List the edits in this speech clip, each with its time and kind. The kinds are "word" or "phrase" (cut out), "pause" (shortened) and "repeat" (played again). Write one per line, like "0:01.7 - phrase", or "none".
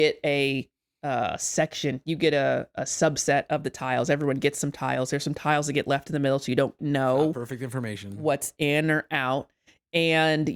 0:06.8 - word